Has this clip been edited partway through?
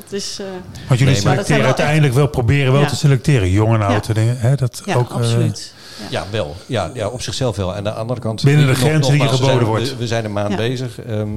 no; 0 cuts

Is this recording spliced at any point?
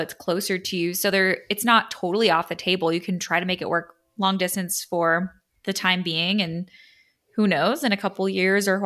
no; 0 cuts

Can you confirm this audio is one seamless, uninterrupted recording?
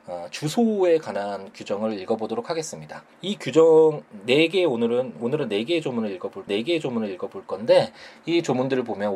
no; 2 cuts; at 3.1 s, 6.5 s

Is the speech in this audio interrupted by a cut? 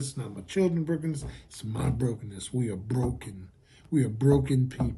no; 0 cuts

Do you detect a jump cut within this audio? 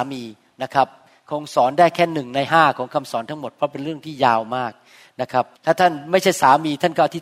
yes; 1 cut; at 5.6 s

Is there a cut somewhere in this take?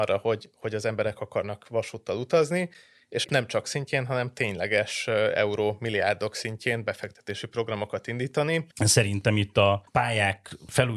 yes; 3 cuts; at 3.2 s, 3.6 s, 8.7 s

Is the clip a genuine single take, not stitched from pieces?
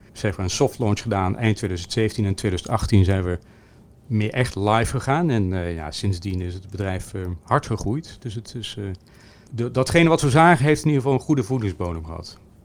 yes; 0 cuts

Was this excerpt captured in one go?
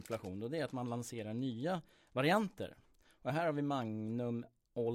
yes; 0 cuts

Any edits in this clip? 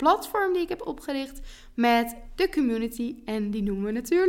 no; 0 cuts

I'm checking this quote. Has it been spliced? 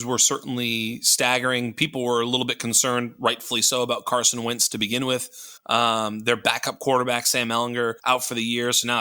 yes; 2 cuts; at 5.6 s, 8.0 s

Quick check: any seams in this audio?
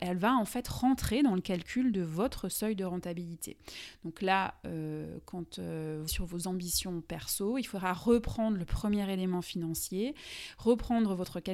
yes; 1 cut; at 6.1 s

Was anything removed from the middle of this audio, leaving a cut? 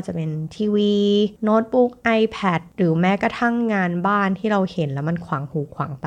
no; 0 cuts

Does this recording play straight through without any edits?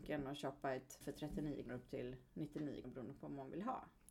no; 3 cuts; at 1.0 s, 1.7 s, 2.8 s

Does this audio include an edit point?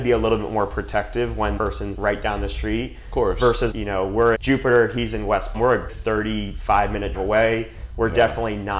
yes; 7 cuts; at 1.6 s, 1.9 s, 3.7 s, 4.3 s, 5.5 s, 5.9 s, 7.1 s

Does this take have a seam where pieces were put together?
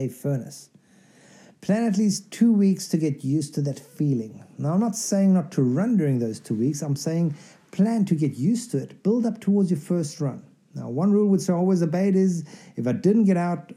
no; 0 cuts

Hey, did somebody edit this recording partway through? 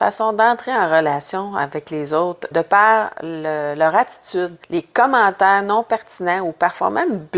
yes; 2 cuts; at 2.5 s, 4.6 s

